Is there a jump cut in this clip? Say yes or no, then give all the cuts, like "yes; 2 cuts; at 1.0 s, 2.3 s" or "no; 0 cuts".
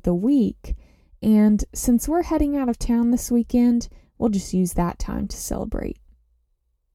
no; 0 cuts